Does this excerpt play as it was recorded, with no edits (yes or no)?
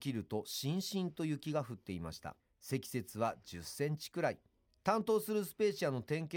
no